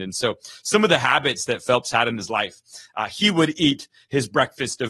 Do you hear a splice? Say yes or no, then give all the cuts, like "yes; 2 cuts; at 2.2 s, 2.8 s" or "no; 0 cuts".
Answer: no; 0 cuts